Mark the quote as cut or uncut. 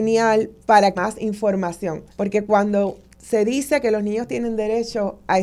cut